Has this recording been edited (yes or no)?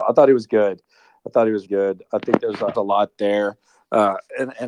yes